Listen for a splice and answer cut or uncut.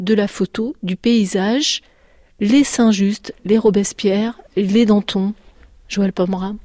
uncut